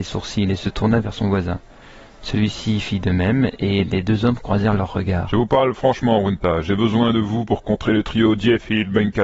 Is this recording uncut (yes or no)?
yes